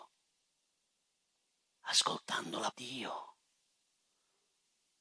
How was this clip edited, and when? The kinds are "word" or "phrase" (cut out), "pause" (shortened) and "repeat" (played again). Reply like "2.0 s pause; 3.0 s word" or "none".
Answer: 2.7 s phrase